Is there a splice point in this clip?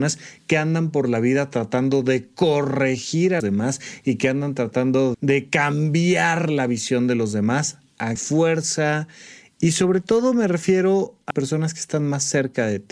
yes; 4 cuts; at 3.4 s, 5.1 s, 8.2 s, 11.3 s

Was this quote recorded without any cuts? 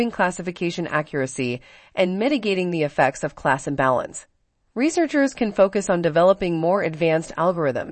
yes; 0 cuts

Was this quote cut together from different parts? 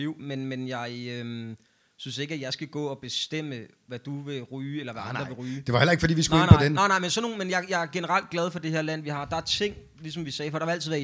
no; 0 cuts

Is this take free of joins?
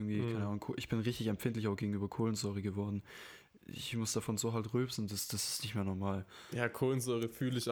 yes; 0 cuts

